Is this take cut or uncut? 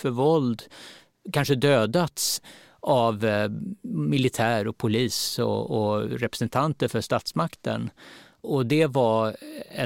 uncut